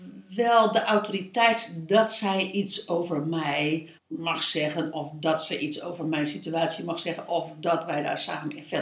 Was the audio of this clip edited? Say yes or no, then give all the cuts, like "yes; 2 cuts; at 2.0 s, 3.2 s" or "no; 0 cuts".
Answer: yes; 1 cut; at 4.0 s